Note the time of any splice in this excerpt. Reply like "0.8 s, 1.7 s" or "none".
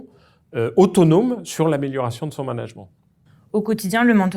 none

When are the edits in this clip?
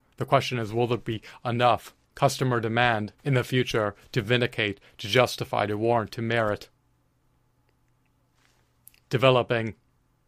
2.0 s, 3.2 s

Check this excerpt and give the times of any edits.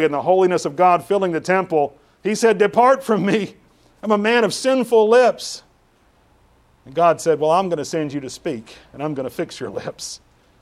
none

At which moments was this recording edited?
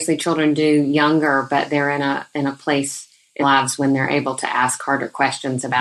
3.4 s

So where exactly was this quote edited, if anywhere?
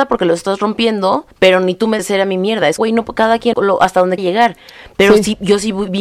1.3 s, 2.0 s, 2.8 s, 3.5 s, 4.2 s

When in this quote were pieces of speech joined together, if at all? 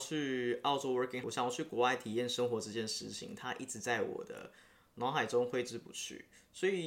1.2 s

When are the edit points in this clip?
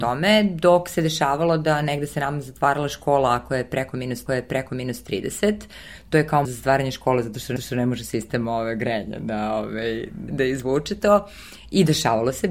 4.3 s, 6.4 s, 7.6 s, 10.3 s

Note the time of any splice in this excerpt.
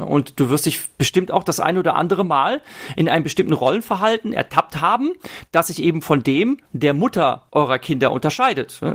6.6 s, 7.5 s

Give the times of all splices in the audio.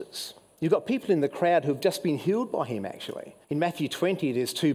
3.4 s

